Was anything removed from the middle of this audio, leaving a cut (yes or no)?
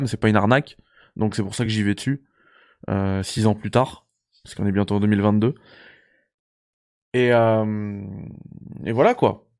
no